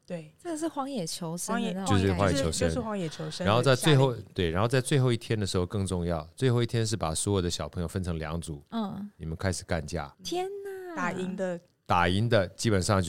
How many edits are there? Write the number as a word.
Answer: one